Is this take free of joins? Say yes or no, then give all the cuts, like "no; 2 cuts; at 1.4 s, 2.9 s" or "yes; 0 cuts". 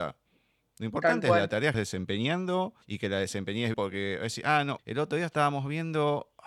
no; 4 cuts; at 1.7 s, 2.8 s, 3.7 s, 4.8 s